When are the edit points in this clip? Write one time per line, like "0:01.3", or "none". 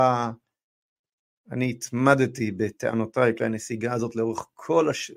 0:03.4